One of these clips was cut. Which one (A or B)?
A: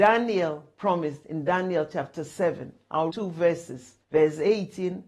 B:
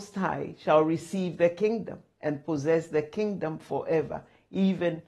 A